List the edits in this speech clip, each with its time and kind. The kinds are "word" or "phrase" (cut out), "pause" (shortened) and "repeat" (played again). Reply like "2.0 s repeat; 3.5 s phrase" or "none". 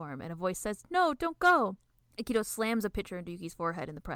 1.9 s pause